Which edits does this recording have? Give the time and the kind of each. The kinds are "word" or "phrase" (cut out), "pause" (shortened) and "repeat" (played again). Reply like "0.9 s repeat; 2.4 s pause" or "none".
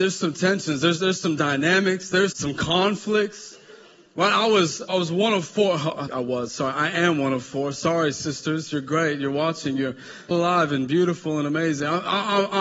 2.3 s word; 4.9 s word; 6.1 s word; 10.3 s word